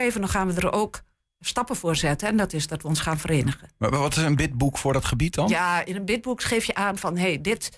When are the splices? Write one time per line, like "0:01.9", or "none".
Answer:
none

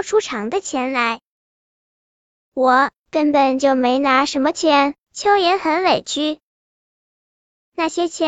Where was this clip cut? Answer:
none

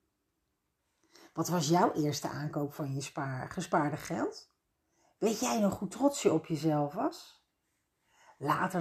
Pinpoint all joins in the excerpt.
none

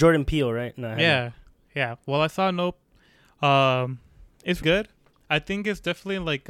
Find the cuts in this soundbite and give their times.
0:04.6

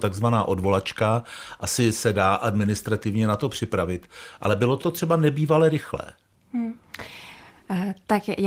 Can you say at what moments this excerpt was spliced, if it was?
0:04.8

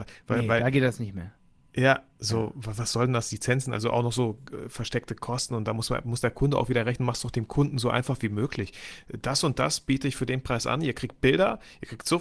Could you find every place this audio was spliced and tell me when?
none

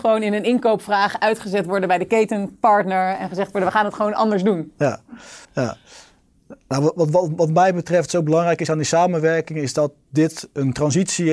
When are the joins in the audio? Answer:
0:05.4

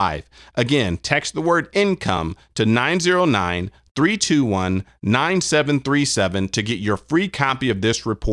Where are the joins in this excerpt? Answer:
none

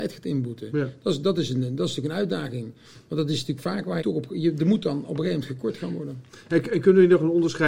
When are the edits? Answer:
0:04.0

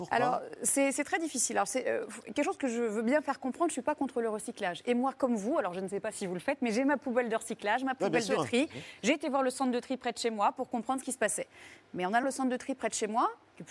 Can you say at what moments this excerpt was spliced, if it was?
0:12.2

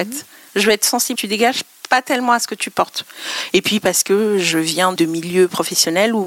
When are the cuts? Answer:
0:01.1
0:05.0

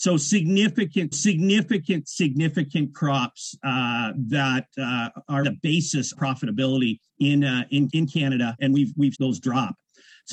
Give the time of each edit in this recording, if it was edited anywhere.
0:01.1
0:05.4
0:06.1
0:07.1
0:07.9
0:08.6
0:09.1

